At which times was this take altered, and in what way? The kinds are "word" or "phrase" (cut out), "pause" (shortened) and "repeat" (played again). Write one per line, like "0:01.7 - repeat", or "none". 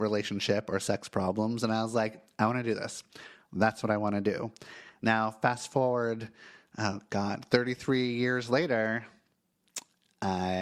none